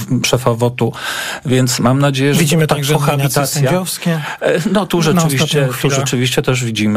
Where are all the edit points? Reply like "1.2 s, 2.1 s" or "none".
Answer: none